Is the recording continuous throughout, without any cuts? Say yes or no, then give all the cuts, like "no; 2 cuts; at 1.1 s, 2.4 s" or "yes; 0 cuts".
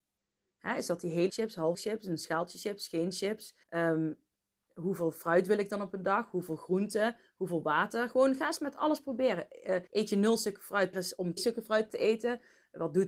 no; 7 cuts; at 1.3 s, 1.7 s, 3.6 s, 9.9 s, 10.9 s, 11.4 s, 11.9 s